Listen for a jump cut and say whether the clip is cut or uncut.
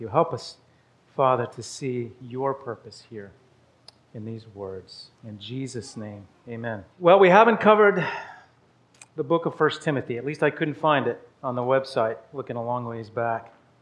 cut